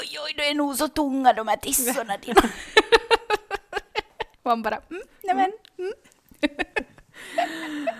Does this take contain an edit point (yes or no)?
yes